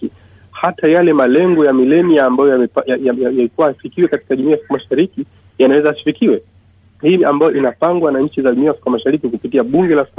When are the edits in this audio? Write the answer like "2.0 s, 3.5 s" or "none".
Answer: 7.2 s